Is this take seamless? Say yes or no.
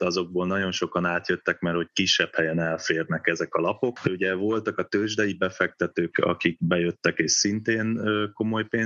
no